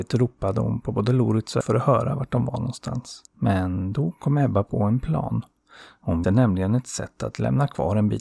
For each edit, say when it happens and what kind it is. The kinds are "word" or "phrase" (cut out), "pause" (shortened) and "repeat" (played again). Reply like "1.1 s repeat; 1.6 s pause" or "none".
1.6 s word; 3.3 s pause; 6.2 s word